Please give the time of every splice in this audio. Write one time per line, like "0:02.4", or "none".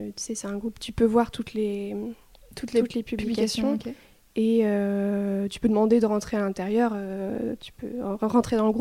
none